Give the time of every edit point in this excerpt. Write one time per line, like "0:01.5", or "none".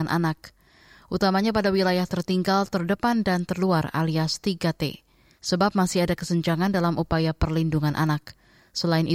none